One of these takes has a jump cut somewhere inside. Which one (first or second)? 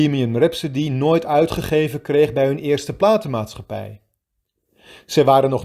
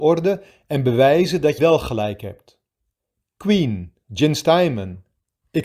second